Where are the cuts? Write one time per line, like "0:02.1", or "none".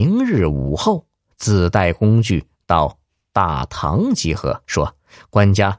0:04.6